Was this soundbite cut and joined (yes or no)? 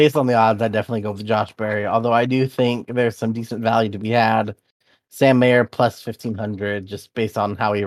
no